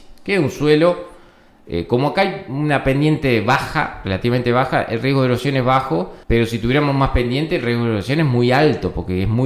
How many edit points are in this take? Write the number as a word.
one